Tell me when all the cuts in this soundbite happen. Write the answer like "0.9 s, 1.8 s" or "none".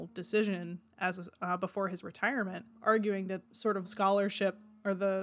3.4 s, 3.8 s